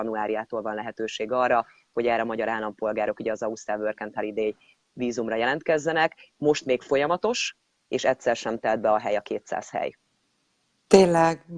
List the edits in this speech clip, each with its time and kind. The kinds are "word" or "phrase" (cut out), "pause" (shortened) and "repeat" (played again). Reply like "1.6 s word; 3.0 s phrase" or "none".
none